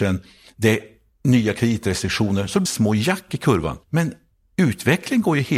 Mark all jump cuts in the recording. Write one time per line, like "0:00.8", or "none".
0:02.7
0:03.8